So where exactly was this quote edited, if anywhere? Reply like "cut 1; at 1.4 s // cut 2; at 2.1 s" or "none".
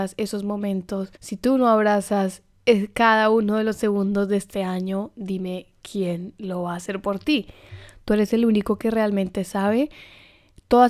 cut 1; at 1.2 s